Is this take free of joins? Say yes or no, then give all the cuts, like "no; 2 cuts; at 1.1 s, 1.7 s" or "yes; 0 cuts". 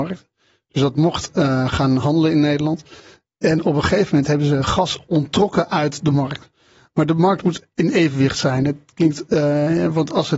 yes; 0 cuts